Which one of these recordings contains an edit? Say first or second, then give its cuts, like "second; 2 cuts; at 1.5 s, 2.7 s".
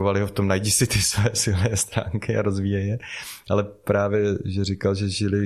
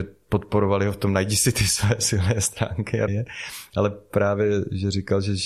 second; 1 cut; at 3.1 s